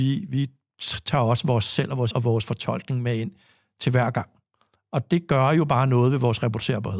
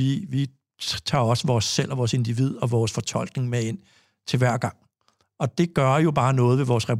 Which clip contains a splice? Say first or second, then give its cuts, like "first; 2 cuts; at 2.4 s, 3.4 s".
first; 1 cut; at 2.1 s